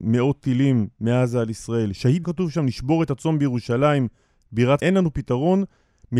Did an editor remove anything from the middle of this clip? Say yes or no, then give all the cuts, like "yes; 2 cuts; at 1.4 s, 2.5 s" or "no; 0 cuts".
yes; 2 cuts; at 2.2 s, 4.8 s